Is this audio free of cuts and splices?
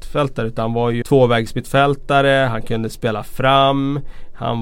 no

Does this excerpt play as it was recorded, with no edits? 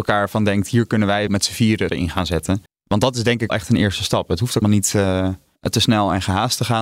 no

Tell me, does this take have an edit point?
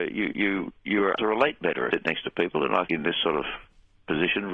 yes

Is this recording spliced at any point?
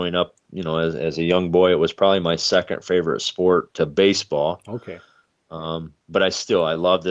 no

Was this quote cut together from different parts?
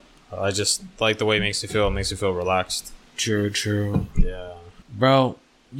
yes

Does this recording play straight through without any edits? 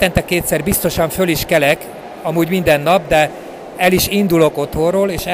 yes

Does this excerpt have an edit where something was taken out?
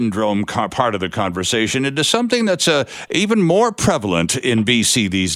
no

